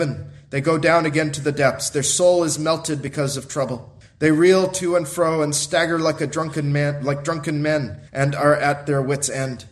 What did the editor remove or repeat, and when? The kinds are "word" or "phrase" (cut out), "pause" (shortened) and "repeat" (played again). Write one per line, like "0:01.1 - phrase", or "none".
0:04.0 - pause
0:08.1 - pause

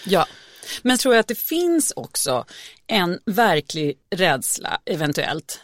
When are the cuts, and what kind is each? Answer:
0:01.0 - word
0:03.2 - pause

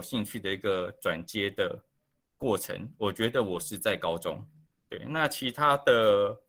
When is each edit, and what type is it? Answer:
0:02.2 - pause
0:04.7 - pause

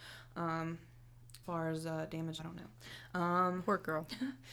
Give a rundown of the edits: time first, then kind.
0:01.4 - word
0:02.4 - word

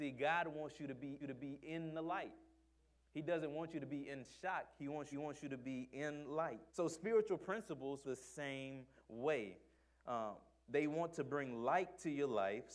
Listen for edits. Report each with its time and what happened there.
0:01.2 - repeat
0:05.1 - repeat
0:06.7 - pause
0:08.0 - word

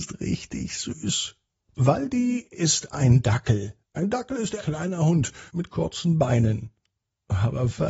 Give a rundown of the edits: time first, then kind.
0:03.8 - pause
0:04.6 - word
0:05.5 - pause

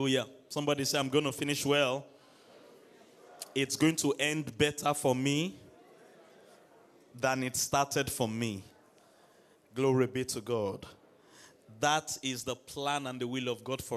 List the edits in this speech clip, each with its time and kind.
none

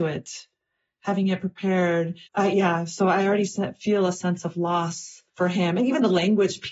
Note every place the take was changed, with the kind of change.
0:02.3 - pause
0:05.3 - pause

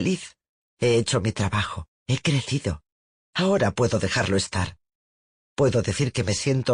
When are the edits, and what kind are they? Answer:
none

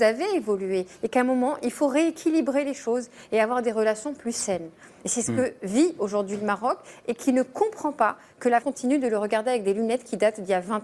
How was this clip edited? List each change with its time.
0:08.6 - word

